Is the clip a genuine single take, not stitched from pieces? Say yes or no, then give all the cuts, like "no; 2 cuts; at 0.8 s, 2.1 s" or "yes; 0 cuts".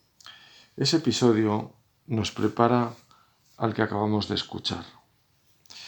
yes; 0 cuts